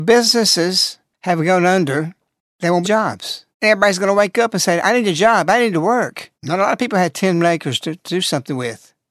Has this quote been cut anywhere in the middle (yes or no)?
yes